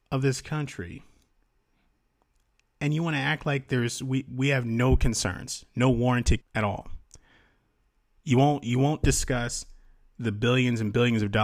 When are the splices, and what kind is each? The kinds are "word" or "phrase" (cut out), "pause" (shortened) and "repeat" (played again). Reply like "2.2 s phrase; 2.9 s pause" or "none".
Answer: 6.4 s phrase